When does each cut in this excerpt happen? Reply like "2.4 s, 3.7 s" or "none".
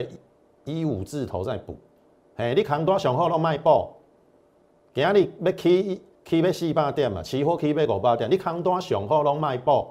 6.1 s

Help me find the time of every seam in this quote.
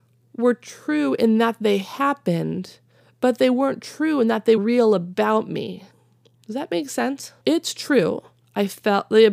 4.6 s, 7.4 s

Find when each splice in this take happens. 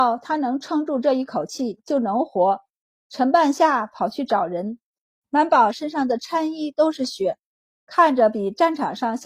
none

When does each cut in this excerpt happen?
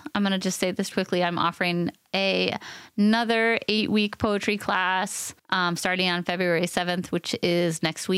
0.9 s, 5.4 s

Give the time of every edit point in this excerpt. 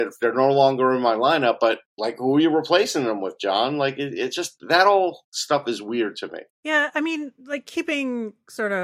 1.9 s, 6.5 s

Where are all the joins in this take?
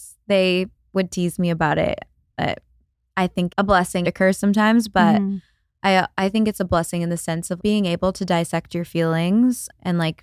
3.5 s, 4.0 s, 7.6 s

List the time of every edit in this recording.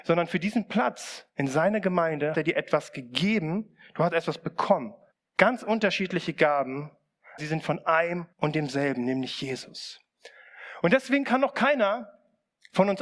2.3 s, 5.1 s, 7.4 s, 8.3 s

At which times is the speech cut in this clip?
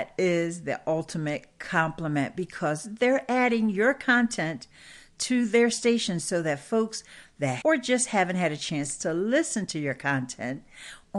7.6 s

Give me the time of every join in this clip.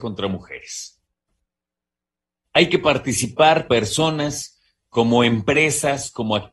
3.7 s

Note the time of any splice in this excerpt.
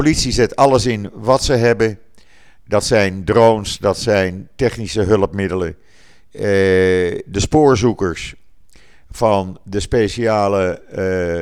none

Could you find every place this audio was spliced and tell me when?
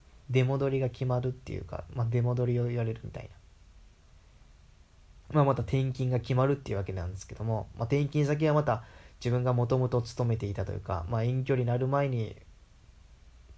5.2 s

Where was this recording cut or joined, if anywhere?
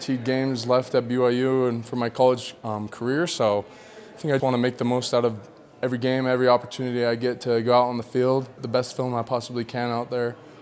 4.4 s, 8.6 s

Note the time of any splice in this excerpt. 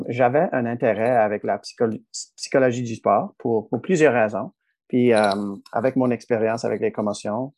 none

